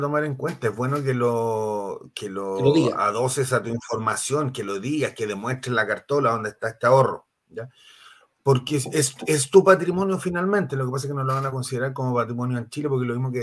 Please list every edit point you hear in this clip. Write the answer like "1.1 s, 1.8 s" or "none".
none